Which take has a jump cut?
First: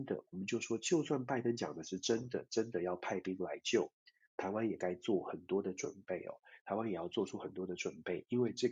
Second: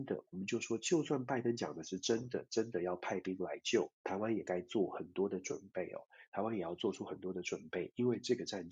second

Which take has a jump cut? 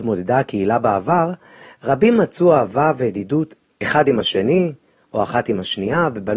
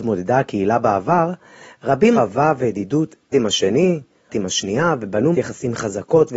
second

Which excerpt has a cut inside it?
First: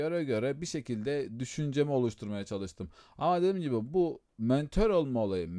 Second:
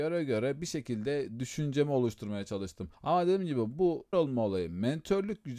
second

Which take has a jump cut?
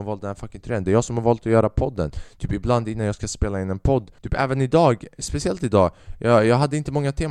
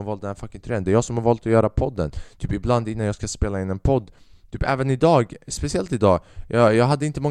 first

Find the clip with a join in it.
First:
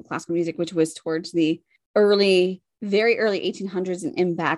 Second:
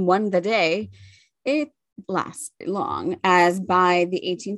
second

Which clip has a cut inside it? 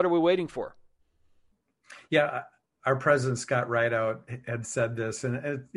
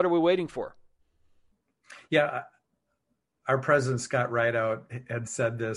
first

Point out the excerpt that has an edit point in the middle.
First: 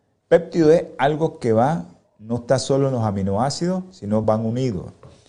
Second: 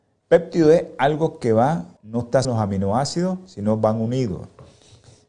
second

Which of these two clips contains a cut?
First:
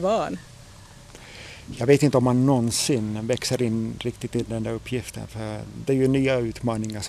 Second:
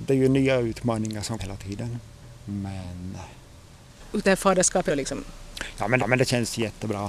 second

